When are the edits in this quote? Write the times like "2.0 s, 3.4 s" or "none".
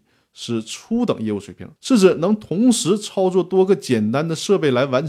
1.8 s

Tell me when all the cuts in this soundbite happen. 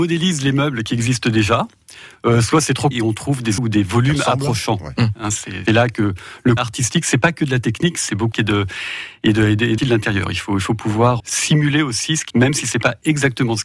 2.9 s, 3.6 s, 5.7 s, 6.6 s, 8.3 s, 9.8 s, 11.2 s, 12.3 s

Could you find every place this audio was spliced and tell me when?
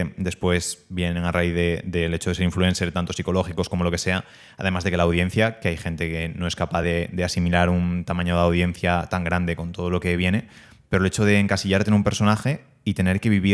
none

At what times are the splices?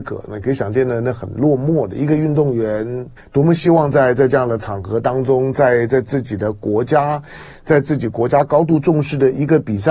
3.2 s

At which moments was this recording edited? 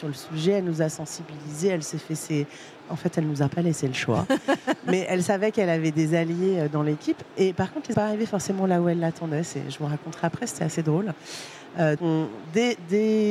7.9 s, 12.0 s

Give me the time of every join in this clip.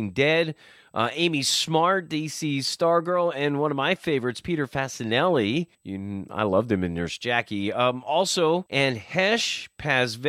5.7 s

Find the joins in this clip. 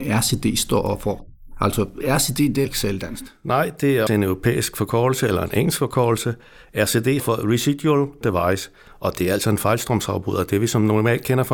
2.6 s, 4.1 s, 7.2 s, 8.2 s

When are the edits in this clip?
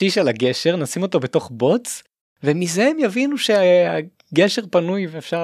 none

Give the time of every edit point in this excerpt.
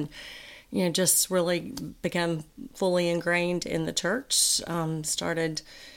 none

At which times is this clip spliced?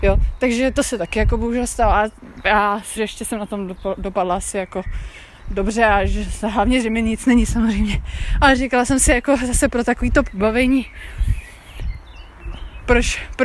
3.0 s

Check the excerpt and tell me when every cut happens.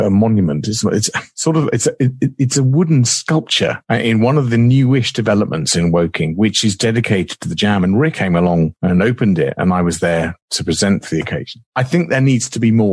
8.1 s

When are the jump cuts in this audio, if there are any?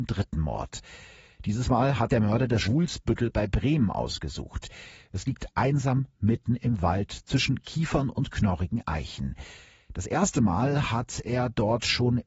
2.1 s, 2.6 s

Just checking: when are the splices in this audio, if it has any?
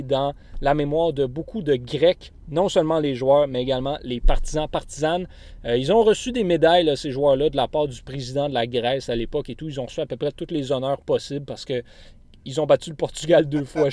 none

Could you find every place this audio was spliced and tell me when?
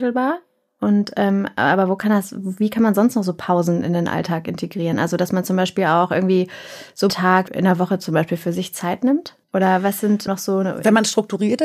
7.1 s, 7.5 s, 9.4 s, 10.3 s

